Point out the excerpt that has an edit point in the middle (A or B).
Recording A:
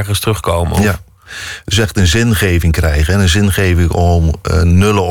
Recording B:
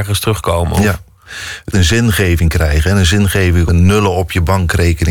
B